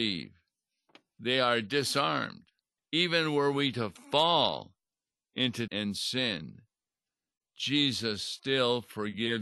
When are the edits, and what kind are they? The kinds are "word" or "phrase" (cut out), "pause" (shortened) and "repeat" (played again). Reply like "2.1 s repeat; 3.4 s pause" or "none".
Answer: 2.8 s pause; 5.7 s word